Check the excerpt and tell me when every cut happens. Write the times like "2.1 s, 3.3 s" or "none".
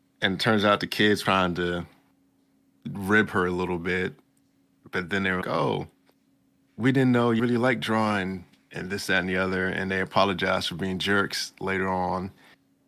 1.2 s, 5.4 s, 7.4 s, 8.6 s